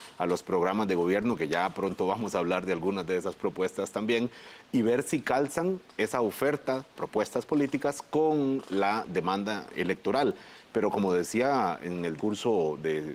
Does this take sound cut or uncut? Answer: cut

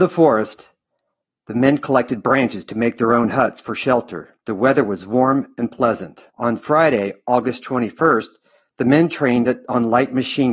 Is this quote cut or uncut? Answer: cut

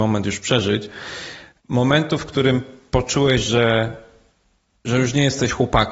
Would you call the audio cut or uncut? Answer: uncut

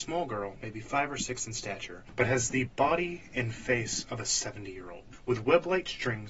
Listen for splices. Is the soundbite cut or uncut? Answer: uncut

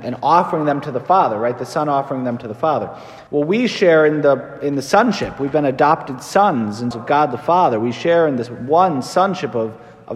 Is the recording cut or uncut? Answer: cut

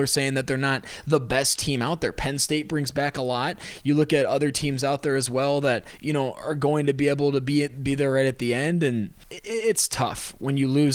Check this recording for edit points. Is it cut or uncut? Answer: uncut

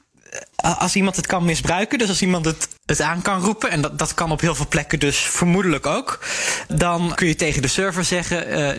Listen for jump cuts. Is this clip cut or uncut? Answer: cut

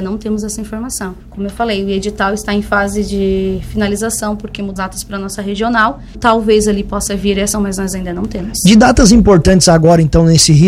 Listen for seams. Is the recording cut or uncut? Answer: cut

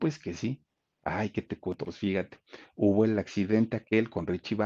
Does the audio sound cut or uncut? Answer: uncut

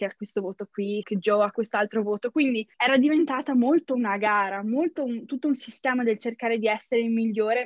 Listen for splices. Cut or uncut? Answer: cut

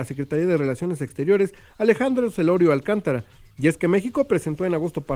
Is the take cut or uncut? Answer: uncut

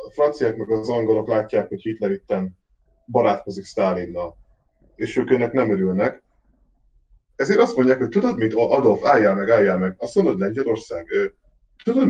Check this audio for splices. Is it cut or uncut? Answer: uncut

